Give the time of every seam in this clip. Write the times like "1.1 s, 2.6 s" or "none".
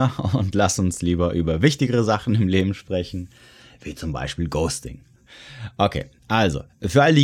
none